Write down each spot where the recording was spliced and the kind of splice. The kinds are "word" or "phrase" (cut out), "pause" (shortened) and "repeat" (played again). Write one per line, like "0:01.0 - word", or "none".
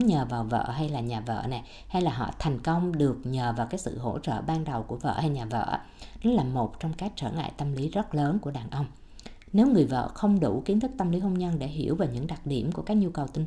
none